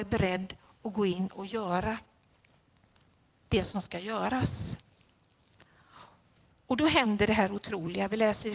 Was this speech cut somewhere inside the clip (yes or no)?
no